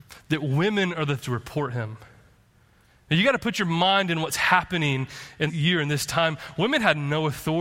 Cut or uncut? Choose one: cut